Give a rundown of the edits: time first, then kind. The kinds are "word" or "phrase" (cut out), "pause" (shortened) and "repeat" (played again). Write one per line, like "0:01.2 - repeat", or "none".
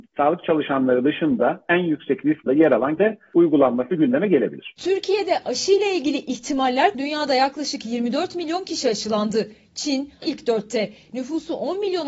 0:02.5 - word
0:03.0 - word
0:06.9 - word
0:10.2 - phrase